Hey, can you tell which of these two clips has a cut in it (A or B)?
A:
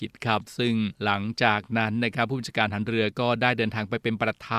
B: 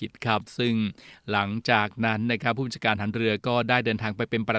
A